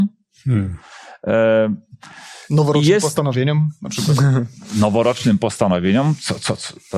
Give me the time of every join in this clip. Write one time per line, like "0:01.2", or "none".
none

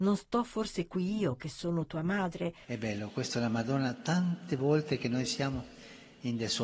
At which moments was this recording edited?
none

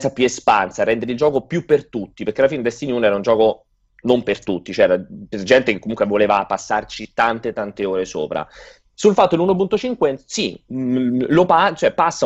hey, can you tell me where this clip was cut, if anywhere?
none

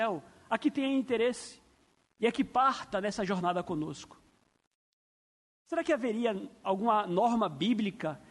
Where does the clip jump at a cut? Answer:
none

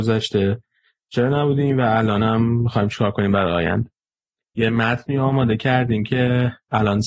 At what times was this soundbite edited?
none

